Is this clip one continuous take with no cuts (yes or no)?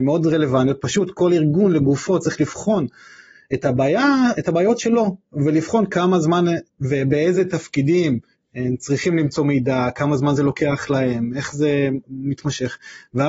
no